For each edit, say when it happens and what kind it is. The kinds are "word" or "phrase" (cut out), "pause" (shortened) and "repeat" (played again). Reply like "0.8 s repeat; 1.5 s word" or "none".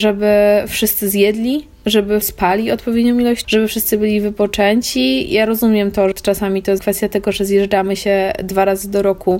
2.2 s word; 3.4 s word; 5.3 s word; 6.1 s word; 6.8 s word

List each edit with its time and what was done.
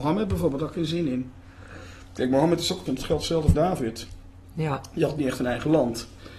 2.9 s word; 3.5 s word

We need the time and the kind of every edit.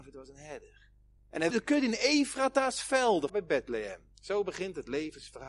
1.2 s pause; 1.5 s word; 3.3 s word; 4.1 s pause

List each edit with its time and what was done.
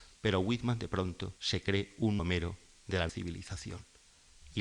1.4 s pause; 2.2 s word; 3.1 s word

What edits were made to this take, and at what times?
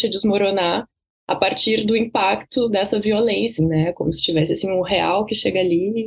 3.6 s word

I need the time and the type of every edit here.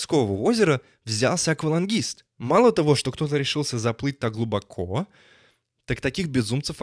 none

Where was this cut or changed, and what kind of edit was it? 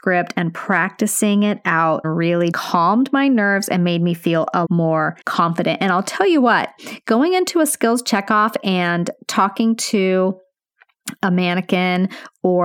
2.0 s phrase; 2.5 s word; 4.6 s word; 5.2 s pause

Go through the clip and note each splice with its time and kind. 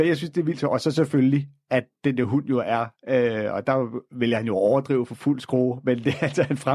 none

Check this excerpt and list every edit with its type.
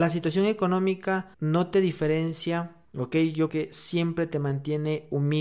1.3 s pause; 2.8 s pause; 3.5 s word

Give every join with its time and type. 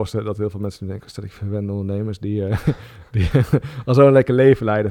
none

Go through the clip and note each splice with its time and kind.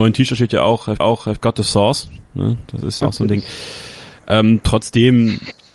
1.0 s repeat; 3.0 s word

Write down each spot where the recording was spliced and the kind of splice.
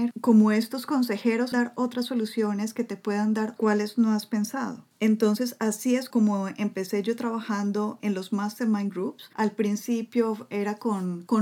1.5 s phrase; 3.6 s phrase; 6.1 s word; 8.0 s word

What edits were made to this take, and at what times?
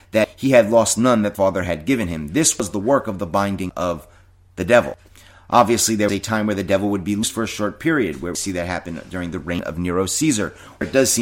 none

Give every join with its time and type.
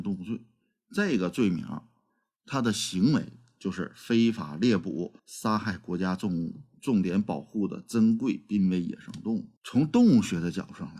5.2 s pause; 9.6 s pause

